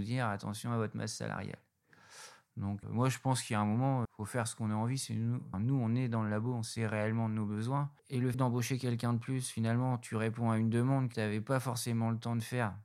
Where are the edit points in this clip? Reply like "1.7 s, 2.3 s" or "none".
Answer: 2.8 s, 4.0 s, 5.5 s, 8.0 s, 8.3 s, 11.1 s